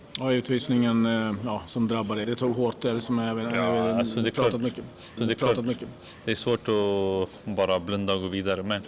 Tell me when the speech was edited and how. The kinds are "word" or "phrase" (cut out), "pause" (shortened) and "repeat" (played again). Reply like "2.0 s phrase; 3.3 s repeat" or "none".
2.2 s word; 5.2 s repeat